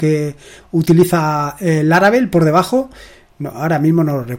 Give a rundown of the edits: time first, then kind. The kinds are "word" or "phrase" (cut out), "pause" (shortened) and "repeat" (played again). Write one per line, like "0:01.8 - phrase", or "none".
none

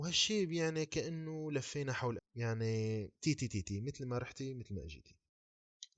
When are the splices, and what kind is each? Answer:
0:02.2 - word
0:03.1 - pause

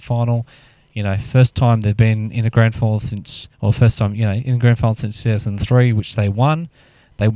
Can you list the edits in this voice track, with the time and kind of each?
0:03.5 - pause

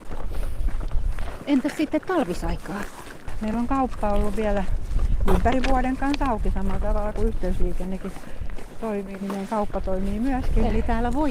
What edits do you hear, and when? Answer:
none

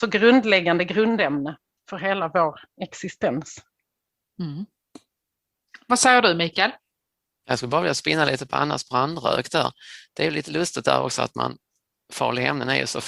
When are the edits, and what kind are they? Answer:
0:01.8 - pause

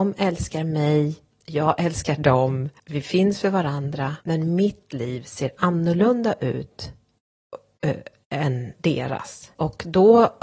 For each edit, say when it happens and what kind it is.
0:01.3 - pause
0:02.8 - pause
0:04.2 - pause

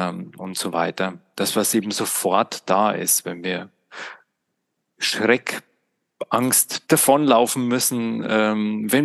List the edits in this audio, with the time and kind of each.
0:06.9 - word

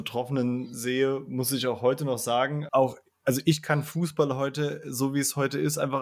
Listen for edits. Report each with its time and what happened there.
0:02.7 - word

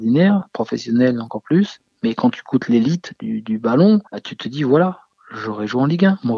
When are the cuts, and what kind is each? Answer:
0:04.1 - pause

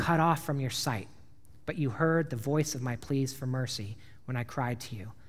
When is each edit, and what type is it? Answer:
none

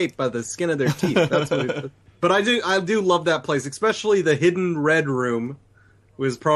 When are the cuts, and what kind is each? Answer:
none

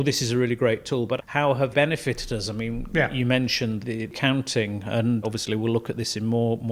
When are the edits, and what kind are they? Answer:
0:01.2 - word
0:01.7 - word
0:03.8 - word
0:05.2 - word

